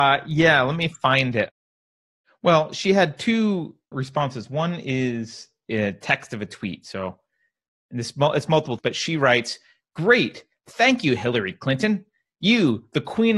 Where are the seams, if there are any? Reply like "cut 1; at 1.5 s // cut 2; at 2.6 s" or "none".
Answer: cut 1; at 3.9 s // cut 2; at 5.6 s // cut 3; at 8.8 s